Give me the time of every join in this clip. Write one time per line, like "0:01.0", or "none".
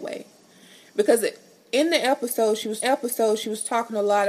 0:02.8

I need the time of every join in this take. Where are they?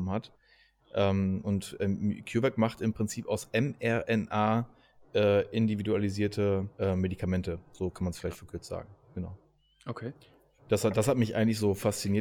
0:06.7

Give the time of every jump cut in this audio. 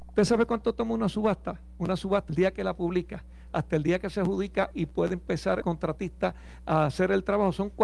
0:02.3
0:05.6

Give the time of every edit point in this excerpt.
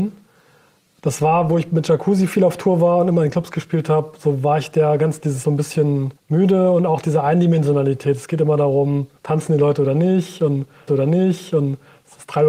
0:05.4
0:06.2
0:09.2
0:10.9

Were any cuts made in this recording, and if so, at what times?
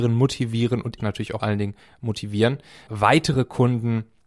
0:01.0
0:01.4
0:02.9

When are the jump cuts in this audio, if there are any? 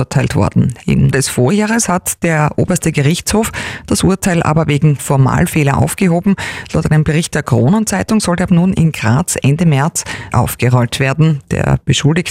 0:01.1
0:05.0
0:08.5
0:10.3

